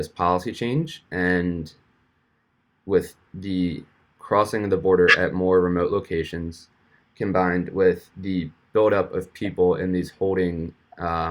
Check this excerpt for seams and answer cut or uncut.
uncut